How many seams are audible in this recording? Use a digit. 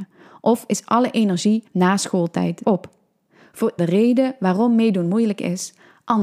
3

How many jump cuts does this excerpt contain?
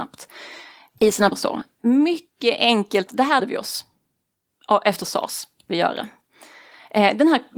4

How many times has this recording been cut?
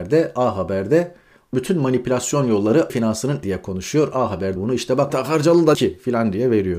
6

